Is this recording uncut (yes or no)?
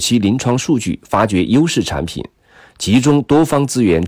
yes